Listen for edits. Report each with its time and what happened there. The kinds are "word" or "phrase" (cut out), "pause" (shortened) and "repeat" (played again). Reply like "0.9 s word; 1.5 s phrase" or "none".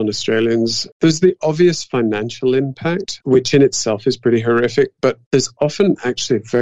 none